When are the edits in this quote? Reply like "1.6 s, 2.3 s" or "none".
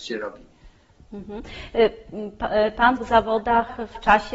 3.0 s